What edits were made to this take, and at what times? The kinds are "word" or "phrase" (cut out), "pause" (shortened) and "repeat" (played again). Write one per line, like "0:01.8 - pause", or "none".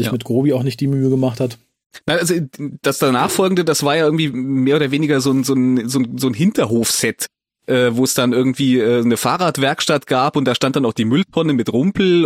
none